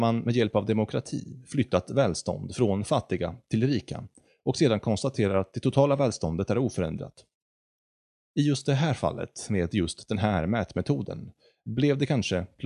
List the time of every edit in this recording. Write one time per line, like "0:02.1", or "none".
none